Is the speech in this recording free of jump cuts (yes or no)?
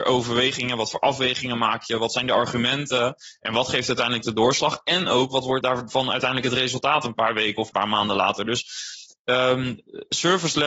no